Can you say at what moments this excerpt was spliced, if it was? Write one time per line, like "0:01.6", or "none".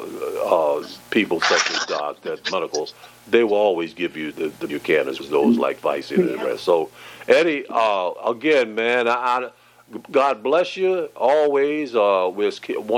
0:04.3
0:04.7
0:05.2

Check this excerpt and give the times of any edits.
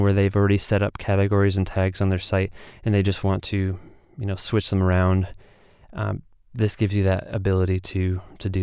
none

